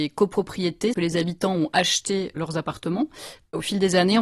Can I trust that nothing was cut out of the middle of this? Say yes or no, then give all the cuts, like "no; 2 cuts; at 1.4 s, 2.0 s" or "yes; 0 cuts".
no; 2 cuts; at 0.9 s, 2.4 s